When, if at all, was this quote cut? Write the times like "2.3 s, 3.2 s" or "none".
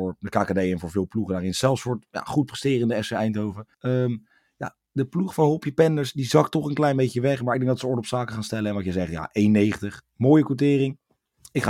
3.7 s